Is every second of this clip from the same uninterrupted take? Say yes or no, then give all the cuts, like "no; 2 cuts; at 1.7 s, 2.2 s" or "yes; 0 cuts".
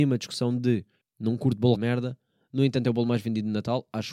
no; 2 cuts; at 1.0 s, 1.8 s